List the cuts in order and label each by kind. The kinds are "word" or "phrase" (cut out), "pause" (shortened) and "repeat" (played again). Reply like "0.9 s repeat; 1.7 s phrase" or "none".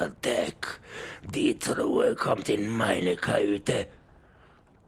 none